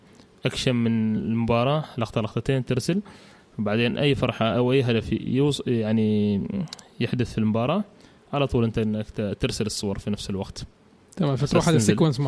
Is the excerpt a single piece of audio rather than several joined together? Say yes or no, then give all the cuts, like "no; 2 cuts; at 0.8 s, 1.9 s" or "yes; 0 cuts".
yes; 0 cuts